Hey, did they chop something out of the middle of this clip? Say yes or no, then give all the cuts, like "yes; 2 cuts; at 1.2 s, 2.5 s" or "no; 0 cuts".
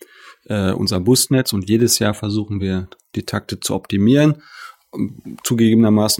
no; 0 cuts